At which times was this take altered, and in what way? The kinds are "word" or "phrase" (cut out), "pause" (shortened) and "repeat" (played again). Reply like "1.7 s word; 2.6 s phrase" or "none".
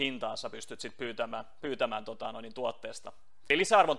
none